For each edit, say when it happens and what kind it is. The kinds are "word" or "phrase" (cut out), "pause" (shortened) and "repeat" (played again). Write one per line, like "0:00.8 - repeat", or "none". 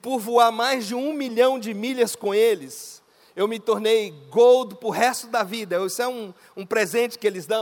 none